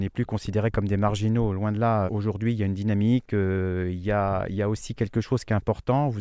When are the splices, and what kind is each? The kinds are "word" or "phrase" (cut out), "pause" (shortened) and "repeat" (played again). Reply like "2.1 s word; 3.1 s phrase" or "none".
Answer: 2.1 s word